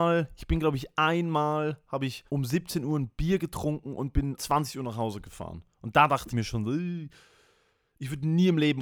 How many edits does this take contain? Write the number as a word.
three